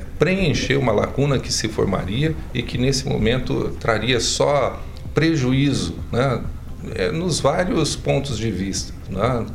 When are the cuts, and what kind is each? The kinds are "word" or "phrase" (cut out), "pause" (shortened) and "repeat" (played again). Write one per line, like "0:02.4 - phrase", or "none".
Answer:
none